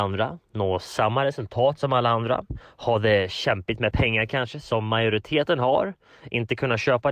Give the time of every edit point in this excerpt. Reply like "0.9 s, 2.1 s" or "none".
none